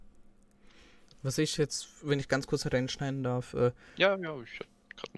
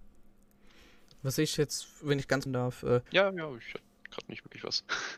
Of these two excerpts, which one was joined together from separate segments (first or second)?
second